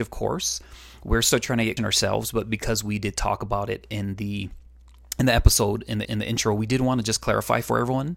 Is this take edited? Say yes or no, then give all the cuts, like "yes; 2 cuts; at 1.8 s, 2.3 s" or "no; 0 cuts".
yes; 2 cuts; at 1.8 s, 6.0 s